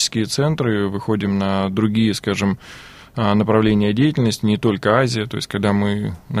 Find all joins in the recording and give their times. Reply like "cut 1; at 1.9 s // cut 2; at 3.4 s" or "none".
none